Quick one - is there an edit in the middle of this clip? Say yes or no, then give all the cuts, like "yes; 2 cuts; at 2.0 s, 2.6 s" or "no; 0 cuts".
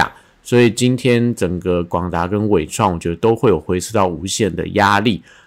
no; 0 cuts